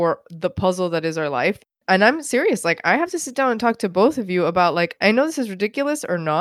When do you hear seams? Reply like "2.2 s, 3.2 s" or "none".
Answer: 5.0 s